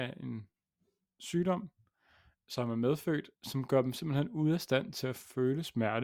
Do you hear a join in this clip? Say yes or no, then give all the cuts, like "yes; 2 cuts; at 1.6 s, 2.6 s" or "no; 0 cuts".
yes; 1 cut; at 3.4 s